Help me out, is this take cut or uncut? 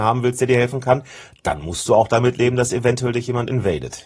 uncut